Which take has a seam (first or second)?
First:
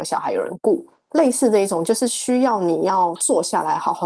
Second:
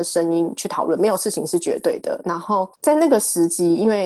second